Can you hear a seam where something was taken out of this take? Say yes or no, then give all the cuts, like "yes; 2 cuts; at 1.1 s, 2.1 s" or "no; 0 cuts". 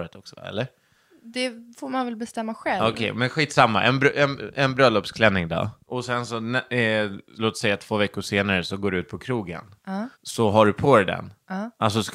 yes; 1 cut; at 10.1 s